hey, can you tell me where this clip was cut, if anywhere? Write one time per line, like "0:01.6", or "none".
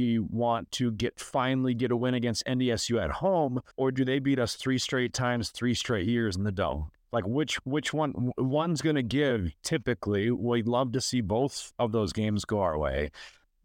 0:03.7
0:11.7